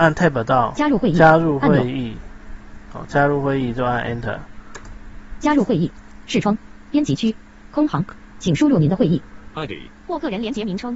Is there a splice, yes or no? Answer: no